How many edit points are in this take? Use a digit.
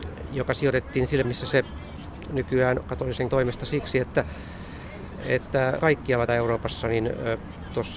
5